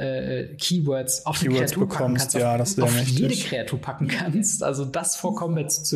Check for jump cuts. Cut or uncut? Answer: cut